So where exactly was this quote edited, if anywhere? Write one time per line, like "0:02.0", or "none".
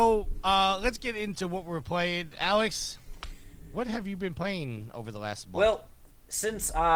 none